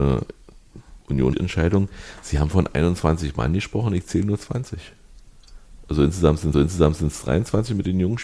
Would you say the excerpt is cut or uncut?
cut